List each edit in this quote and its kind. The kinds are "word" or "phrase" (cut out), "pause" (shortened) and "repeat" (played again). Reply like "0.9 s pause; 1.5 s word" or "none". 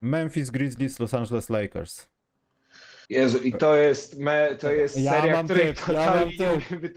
3.0 s pause